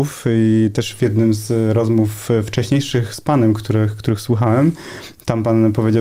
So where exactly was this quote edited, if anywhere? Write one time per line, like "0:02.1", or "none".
none